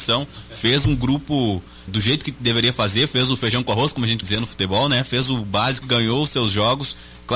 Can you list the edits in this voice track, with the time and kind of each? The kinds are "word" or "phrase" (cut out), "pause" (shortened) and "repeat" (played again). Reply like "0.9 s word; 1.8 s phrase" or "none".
1.9 s word; 4.2 s word; 5.8 s word